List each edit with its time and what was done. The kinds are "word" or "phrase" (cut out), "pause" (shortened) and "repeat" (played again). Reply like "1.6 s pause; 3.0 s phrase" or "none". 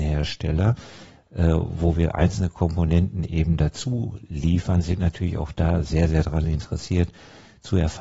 none